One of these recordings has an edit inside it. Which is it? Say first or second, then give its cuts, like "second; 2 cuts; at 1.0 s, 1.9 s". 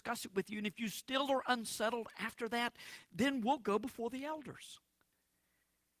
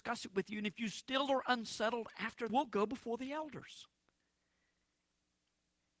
second; 1 cut; at 2.5 s